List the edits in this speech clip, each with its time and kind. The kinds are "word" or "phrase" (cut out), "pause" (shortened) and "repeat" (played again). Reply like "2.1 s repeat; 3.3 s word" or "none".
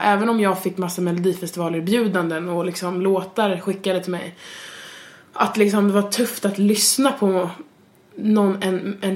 none